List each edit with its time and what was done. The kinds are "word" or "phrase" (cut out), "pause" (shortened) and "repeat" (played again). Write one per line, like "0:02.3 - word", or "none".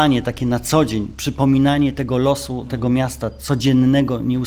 none